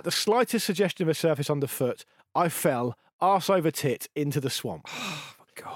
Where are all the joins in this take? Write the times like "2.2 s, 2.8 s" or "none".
1.2 s